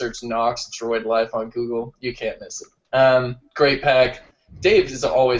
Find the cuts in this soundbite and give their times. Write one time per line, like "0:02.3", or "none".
none